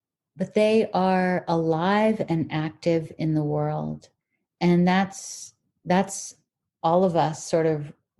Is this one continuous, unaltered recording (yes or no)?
yes